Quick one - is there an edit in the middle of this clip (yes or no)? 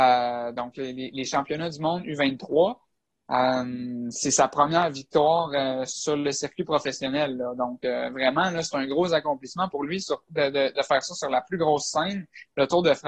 no